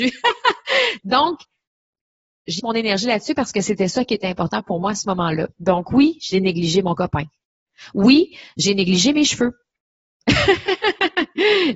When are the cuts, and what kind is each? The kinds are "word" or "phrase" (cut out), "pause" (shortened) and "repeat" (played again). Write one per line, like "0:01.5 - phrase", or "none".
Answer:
0:02.6 - phrase